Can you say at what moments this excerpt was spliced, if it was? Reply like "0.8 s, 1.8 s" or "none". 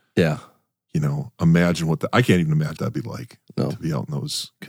2.8 s